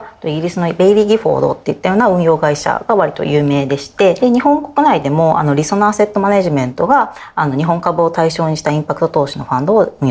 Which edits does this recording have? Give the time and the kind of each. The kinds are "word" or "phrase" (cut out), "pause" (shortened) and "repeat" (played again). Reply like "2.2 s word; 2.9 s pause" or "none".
4.2 s phrase